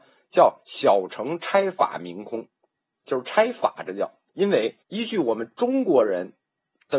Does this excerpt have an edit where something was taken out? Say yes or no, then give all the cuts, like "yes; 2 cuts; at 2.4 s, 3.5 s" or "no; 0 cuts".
yes; 2 cuts; at 4.3 s, 4.8 s